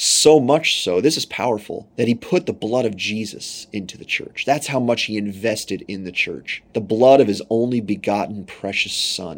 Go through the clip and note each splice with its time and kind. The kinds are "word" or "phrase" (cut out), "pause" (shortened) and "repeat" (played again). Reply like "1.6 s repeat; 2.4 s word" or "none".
1.9 s pause; 6.7 s pause